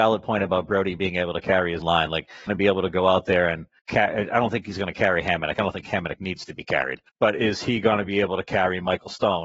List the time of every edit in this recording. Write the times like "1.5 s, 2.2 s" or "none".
1.8 s, 2.5 s, 3.8 s, 7.1 s